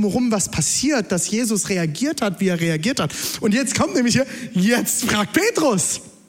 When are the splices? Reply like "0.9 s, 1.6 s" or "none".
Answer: none